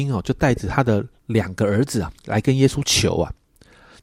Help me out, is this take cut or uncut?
cut